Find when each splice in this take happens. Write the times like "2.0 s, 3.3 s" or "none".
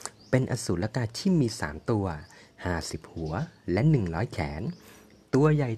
none